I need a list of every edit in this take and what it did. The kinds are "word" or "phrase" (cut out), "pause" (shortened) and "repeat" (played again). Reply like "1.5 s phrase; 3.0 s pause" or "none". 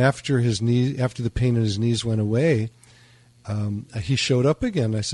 none